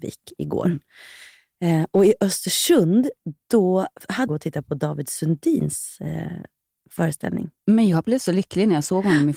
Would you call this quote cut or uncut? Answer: cut